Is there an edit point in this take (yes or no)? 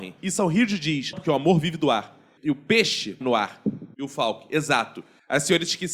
yes